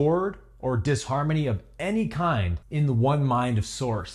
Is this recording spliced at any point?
yes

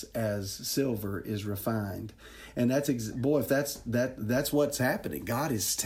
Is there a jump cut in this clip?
no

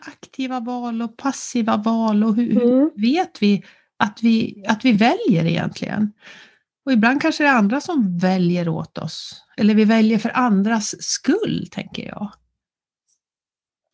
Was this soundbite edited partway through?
no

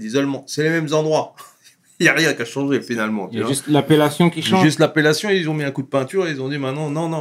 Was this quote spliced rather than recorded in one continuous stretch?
no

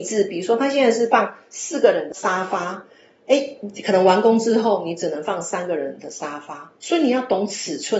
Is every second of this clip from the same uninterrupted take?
yes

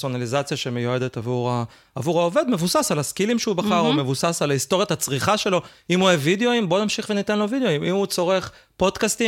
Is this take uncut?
yes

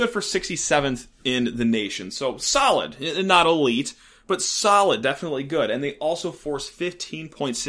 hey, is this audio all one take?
yes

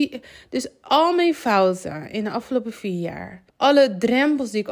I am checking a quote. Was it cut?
yes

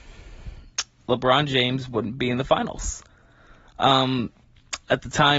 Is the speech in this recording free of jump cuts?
yes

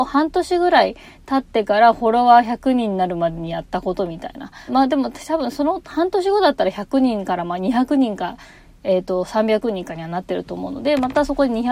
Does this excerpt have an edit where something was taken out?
yes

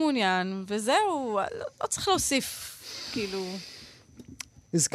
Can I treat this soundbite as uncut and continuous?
yes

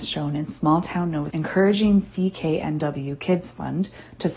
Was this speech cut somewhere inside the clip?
yes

